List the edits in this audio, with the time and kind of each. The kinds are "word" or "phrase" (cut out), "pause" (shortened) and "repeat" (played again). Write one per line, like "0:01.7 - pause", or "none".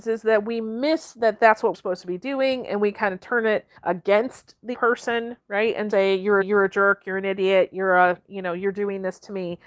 0:01.7 - word
0:03.8 - pause
0:04.7 - word
0:05.9 - word
0:06.4 - repeat